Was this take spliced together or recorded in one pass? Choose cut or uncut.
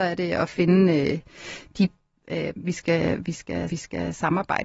cut